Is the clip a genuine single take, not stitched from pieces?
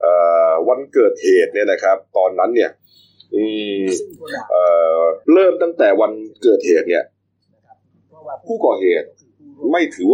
no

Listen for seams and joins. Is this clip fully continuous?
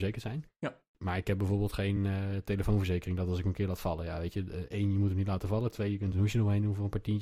yes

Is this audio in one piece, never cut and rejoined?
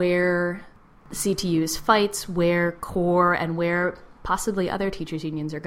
yes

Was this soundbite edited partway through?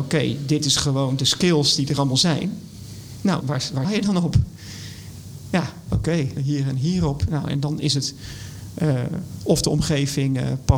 yes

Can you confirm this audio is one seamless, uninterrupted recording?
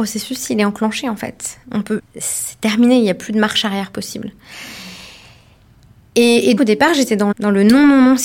no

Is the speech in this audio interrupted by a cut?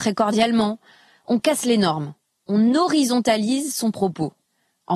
no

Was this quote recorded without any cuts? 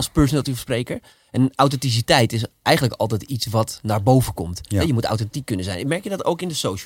yes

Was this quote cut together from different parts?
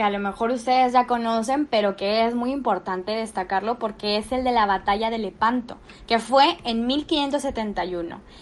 no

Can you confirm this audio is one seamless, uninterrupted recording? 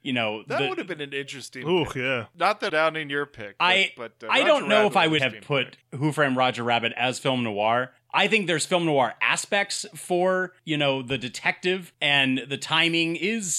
no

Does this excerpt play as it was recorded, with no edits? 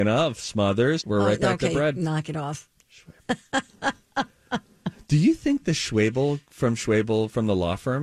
no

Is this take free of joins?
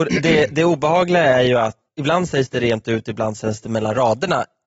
no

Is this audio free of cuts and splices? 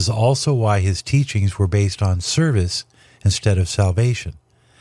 yes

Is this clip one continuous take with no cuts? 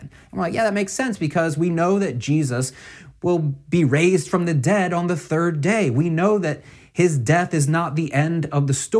yes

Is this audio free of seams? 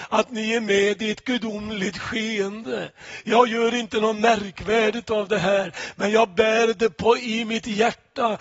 yes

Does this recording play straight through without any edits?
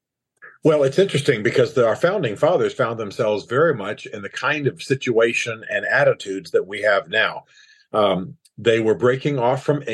yes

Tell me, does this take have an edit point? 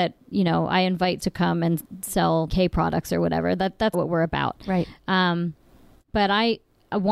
yes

